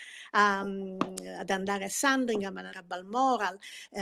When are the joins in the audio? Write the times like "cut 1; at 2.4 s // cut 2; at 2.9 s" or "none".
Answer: cut 1; at 2.7 s